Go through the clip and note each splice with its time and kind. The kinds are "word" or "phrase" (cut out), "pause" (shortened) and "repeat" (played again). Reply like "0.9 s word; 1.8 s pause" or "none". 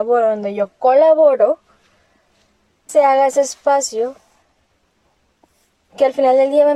2.9 s word